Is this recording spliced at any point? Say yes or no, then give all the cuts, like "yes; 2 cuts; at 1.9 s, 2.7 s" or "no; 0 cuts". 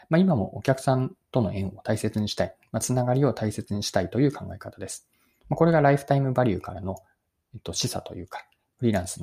no; 0 cuts